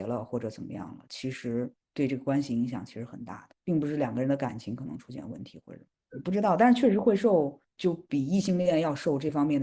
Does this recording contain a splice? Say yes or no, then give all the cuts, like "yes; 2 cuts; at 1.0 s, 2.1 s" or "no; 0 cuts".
no; 0 cuts